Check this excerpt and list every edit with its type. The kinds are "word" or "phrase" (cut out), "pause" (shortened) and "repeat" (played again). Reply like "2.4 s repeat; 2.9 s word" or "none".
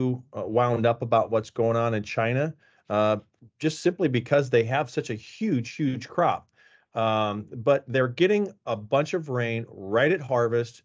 none